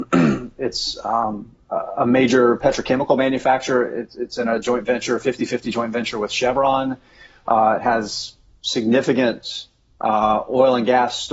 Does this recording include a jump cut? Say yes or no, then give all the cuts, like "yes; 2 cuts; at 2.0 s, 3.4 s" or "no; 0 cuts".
no; 0 cuts